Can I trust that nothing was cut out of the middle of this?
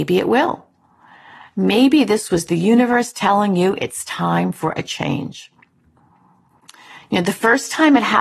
yes; 0 cuts

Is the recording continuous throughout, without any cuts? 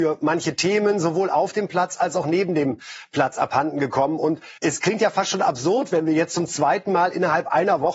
no; 1 cut; at 4.6 s

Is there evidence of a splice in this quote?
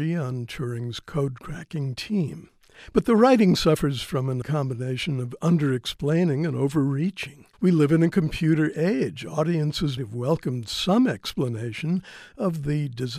yes; 3 cuts; at 4.4 s, 7.5 s, 10.0 s

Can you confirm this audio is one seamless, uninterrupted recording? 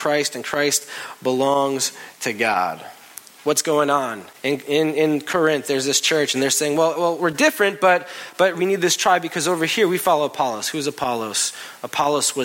no; 2 cuts; at 4.3 s, 8.5 s

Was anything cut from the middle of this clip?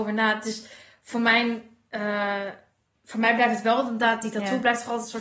no; 0 cuts

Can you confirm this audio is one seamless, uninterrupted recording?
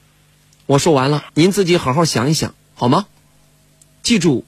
no; 1 cut; at 1.3 s

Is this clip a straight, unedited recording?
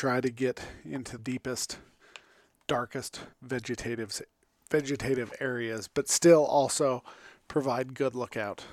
no; 2 cuts; at 1.2 s, 3.3 s

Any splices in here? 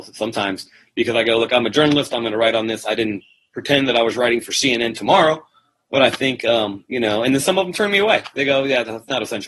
no; 0 cuts

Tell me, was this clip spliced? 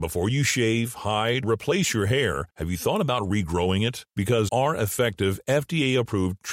yes; 2 cuts; at 1.4 s, 4.5 s

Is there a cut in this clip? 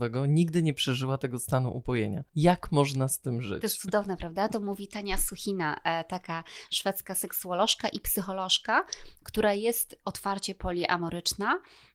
yes; 1 cut; at 2.3 s

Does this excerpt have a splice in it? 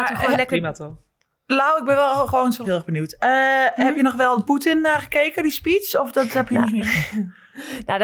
yes; 1 cut; at 2.6 s

